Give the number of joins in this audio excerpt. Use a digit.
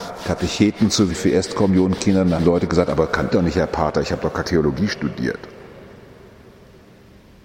4